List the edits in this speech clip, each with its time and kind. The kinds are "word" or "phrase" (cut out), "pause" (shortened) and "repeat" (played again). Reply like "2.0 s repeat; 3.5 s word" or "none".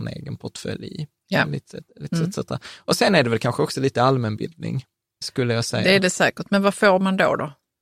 none